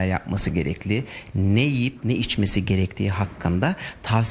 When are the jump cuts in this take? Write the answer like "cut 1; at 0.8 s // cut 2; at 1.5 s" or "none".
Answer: none